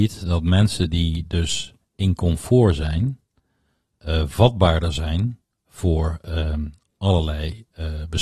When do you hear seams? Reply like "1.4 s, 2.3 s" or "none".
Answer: none